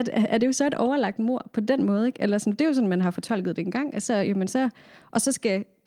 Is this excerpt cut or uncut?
uncut